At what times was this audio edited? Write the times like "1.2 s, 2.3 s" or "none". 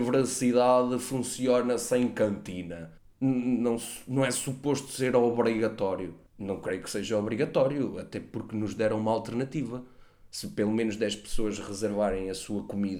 3.0 s, 6.3 s